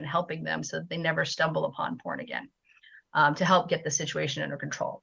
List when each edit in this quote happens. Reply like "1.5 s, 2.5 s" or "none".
none